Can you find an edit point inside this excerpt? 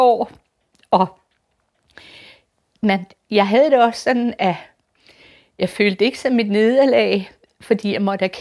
no; 0 cuts

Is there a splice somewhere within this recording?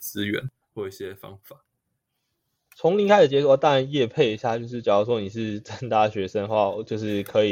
no; 0 cuts

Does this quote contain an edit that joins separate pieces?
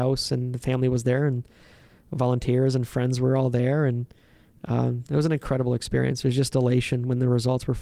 no; 0 cuts

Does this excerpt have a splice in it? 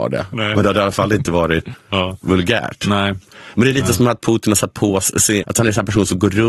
yes; 2 cuts; at 1.7 s, 5.4 s

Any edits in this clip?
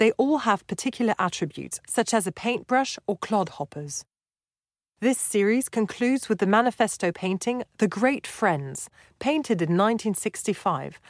no; 0 cuts

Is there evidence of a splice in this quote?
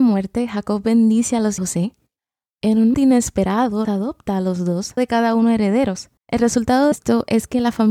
yes; 6 cuts; at 1.6 s, 2.9 s, 3.8 s, 5.0 s, 6.2 s, 6.9 s

